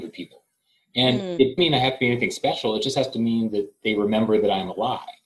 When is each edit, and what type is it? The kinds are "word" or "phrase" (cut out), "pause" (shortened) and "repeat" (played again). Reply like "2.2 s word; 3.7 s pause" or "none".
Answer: 1.6 s word